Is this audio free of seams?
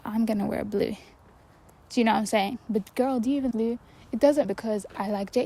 no; 2 cuts; at 3.5 s, 4.4 s

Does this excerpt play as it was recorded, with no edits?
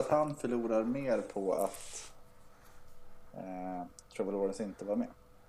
yes; 0 cuts

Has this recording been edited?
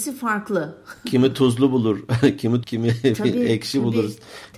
yes; 1 cut; at 2.6 s

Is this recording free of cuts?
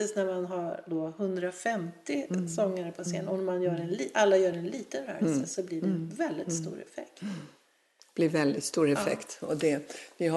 yes; 0 cuts

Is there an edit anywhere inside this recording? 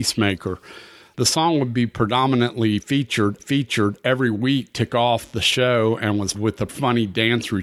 yes; 4 cuts; at 3.4 s, 4.9 s, 6.3 s, 6.7 s

